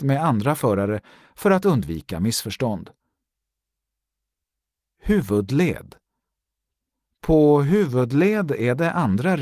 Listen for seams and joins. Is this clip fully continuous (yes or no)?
yes